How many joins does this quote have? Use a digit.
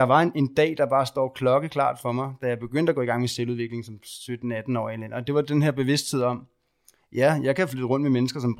0